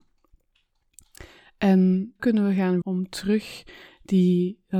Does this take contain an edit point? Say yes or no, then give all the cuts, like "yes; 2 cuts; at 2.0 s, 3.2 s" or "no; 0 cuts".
yes; 2 cuts; at 2.2 s, 2.8 s